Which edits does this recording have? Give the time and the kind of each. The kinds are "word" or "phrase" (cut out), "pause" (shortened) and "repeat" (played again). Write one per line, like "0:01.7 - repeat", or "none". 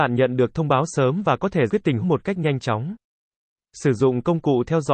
0:01.7 - word
0:02.0 - word